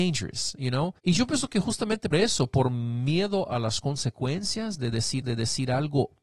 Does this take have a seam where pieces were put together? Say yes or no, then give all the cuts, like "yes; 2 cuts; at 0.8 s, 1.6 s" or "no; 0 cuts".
yes; 3 cuts; at 1.0 s, 2.1 s, 5.2 s